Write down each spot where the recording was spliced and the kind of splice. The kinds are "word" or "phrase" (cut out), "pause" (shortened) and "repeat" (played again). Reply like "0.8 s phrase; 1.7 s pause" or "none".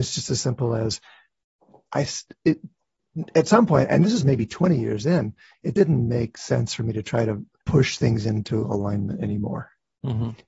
7.6 s word